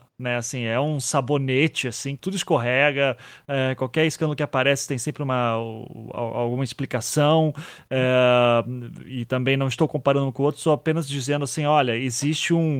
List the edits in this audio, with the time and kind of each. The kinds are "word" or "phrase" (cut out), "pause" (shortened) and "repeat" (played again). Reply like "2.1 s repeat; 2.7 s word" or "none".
2.2 s word